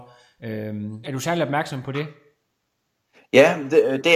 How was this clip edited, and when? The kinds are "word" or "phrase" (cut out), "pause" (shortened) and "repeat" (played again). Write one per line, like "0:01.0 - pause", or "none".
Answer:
0:01.0 - word